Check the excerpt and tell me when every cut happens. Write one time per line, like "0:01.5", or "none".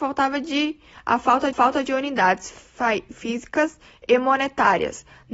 0:01.5